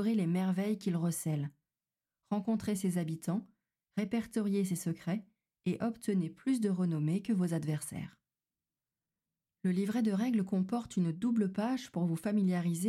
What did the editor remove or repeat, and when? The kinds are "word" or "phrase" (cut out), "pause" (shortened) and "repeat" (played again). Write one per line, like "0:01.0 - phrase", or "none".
none